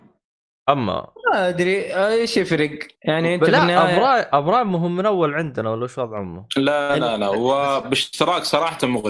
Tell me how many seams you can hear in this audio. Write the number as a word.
one